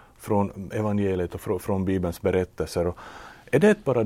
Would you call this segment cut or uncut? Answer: cut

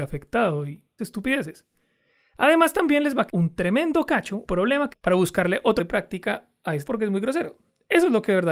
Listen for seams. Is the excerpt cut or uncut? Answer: cut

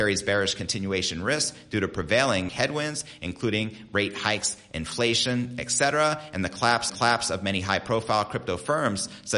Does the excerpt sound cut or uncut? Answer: cut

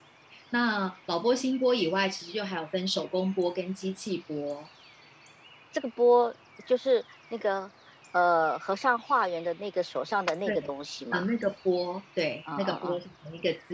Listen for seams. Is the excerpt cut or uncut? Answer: uncut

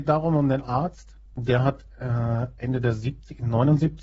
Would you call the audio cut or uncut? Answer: cut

